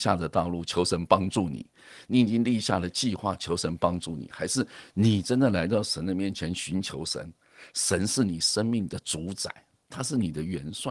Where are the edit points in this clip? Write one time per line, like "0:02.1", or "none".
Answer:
none